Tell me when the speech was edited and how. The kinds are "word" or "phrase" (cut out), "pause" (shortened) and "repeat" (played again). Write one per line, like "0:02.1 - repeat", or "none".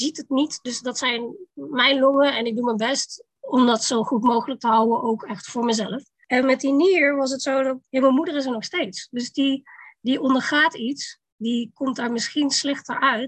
none